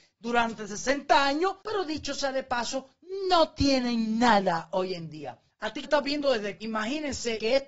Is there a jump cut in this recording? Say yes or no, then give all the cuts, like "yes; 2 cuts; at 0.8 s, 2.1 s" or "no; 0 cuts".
yes; 3 cuts; at 1.6 s, 5.8 s, 6.6 s